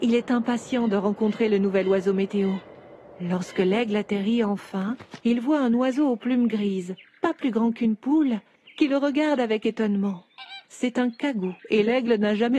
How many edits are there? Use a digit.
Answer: 4